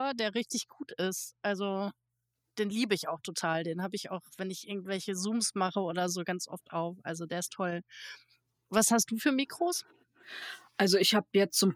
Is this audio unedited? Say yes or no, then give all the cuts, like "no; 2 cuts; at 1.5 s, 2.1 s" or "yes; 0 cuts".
yes; 0 cuts